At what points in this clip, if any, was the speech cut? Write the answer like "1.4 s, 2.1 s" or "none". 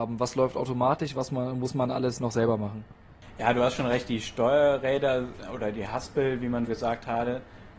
6.7 s